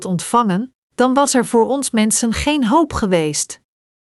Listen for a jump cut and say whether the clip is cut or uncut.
uncut